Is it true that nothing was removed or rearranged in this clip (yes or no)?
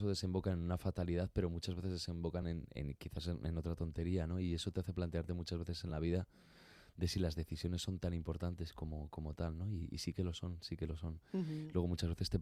yes